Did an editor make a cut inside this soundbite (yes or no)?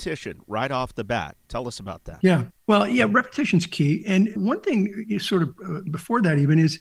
yes